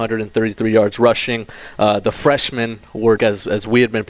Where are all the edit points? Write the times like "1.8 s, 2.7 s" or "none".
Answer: 3.2 s